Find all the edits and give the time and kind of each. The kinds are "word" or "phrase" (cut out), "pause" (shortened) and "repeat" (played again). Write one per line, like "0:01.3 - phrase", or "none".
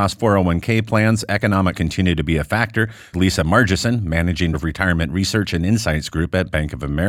0:01.7 - word
0:03.1 - word
0:04.5 - word